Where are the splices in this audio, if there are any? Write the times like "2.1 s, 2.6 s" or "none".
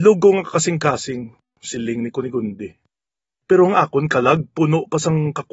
none